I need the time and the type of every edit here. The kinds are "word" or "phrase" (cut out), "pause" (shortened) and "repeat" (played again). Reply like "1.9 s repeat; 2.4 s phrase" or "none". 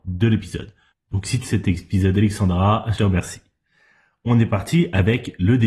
1.4 s word; 3.0 s word